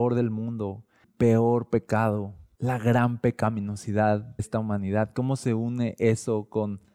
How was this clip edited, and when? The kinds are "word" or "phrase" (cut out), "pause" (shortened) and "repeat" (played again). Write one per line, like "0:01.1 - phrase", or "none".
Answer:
0:01.0 - word
0:04.4 - word